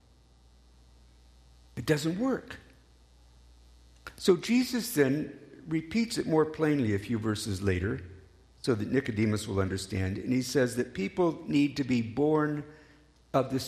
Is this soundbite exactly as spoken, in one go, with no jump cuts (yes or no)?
yes